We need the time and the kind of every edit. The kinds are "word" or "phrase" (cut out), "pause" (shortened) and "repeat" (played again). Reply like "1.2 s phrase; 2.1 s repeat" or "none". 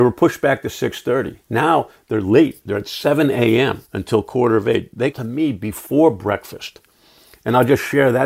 1.4 s pause; 3.9 s pause; 5.1 s word